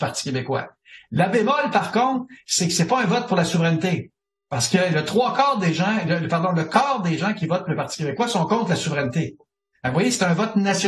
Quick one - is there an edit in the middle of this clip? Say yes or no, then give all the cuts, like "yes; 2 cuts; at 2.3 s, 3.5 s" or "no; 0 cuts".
no; 0 cuts